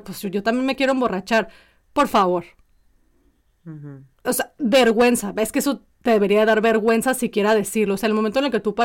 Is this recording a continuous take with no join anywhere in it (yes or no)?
yes